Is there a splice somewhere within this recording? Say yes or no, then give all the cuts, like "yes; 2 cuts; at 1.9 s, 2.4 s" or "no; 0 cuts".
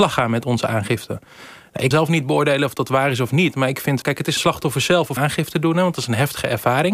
yes; 4 cuts; at 1.9 s, 4.0 s, 4.4 s, 5.2 s